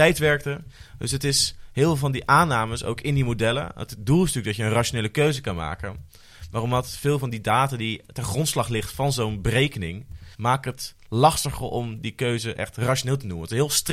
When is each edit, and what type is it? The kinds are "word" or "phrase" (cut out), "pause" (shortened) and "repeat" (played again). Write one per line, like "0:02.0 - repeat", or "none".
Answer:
0:10.3 - pause